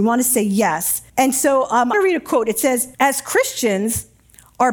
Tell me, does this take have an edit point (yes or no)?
yes